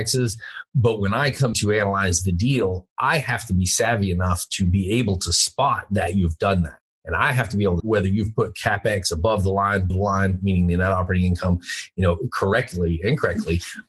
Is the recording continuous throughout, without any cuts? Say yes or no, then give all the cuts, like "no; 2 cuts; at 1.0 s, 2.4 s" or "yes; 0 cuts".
no; 3 cuts; at 1.5 s, 7.8 s, 9.9 s